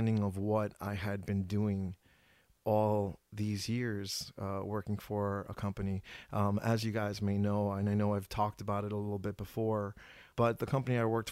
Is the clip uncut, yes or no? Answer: yes